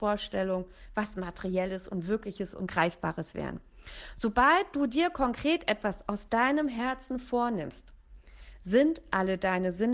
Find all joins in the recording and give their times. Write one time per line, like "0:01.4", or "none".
none